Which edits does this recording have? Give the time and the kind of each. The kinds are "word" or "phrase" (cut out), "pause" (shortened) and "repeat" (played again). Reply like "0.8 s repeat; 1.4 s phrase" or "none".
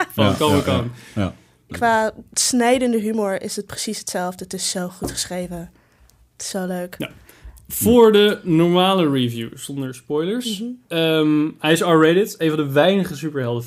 1.7 s word